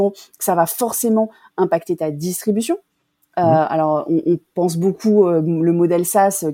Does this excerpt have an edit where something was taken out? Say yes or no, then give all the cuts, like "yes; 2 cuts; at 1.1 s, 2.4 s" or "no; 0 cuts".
no; 0 cuts